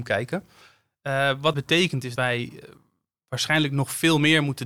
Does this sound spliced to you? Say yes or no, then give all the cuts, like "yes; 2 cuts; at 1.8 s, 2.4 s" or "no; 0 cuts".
yes; 2 cuts; at 1.5 s, 2.2 s